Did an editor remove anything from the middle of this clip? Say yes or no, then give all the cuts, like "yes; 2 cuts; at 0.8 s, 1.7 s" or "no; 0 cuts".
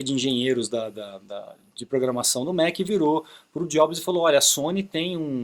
no; 0 cuts